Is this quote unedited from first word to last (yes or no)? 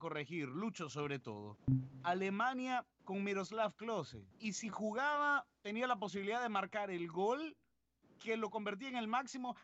no